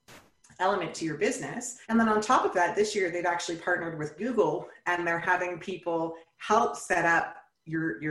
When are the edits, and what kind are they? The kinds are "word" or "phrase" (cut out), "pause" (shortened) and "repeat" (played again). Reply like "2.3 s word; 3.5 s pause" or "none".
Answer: 1.8 s pause